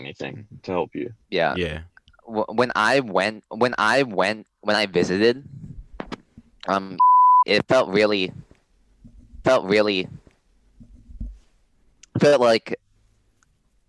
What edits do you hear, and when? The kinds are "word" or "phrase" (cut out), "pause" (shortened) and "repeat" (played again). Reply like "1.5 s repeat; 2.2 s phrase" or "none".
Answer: 1.2 s pause; 3.5 s repeat; 7.4 s word; 9.4 s repeat